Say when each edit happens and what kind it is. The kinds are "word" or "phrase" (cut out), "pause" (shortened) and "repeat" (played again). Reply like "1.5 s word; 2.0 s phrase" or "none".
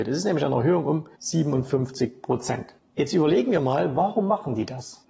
1.1 s pause

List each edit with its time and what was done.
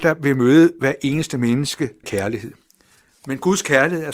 2.0 s word

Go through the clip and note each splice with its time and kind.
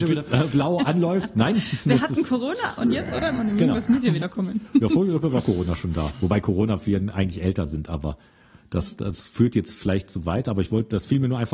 5.4 s word

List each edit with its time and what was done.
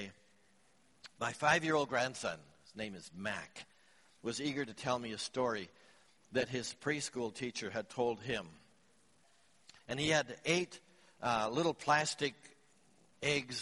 none

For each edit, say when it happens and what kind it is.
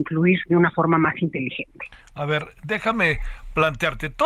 none

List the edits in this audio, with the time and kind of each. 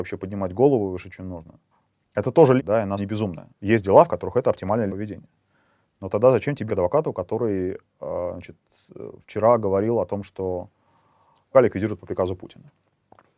1.7 s pause; 2.6 s phrase; 3.0 s word; 3.5 s pause; 4.9 s word; 6.7 s word; 11.5 s word

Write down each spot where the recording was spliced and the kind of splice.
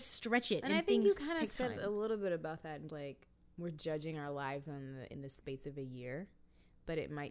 2.9 s word

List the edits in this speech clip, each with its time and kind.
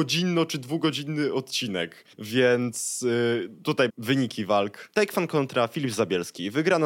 2.1 s pause; 3.9 s phrase

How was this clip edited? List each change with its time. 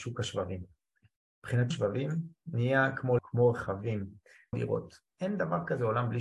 1.7 s word; 3.2 s word; 4.5 s word

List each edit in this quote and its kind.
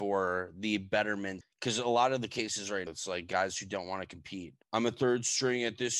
1.4 s word; 2.9 s word; 4.6 s pause

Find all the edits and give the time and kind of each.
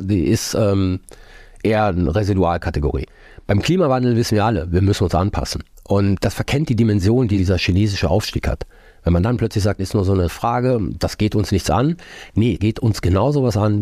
9.8 s word; 10.3 s word; 12.6 s word

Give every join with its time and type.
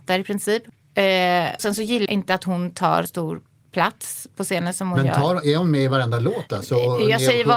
1.6 s word; 2.1 s word; 3.1 s word

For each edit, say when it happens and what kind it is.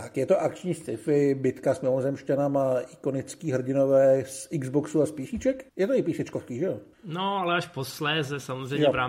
5.7 s pause; 6.9 s pause

